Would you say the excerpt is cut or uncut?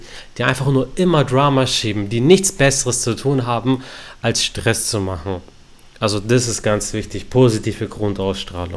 uncut